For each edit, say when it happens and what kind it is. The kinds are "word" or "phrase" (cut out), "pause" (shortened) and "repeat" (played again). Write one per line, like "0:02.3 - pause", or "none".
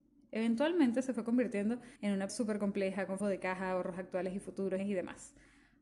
0:02.0 - pause
0:02.3 - word
0:03.2 - word
0:04.8 - word